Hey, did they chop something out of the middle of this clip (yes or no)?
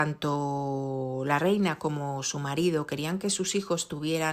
no